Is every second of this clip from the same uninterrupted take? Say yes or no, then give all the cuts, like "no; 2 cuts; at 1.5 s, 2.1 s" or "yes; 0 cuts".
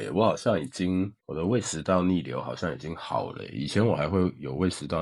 no; 1 cut; at 1.2 s